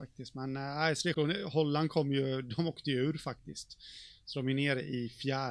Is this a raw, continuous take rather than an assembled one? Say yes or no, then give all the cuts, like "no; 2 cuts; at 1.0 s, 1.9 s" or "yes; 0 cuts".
no; 1 cut; at 1.1 s